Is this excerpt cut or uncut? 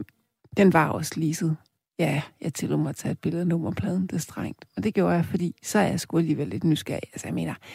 uncut